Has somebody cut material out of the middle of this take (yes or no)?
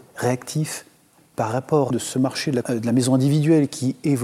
yes